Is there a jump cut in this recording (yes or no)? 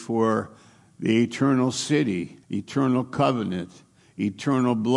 yes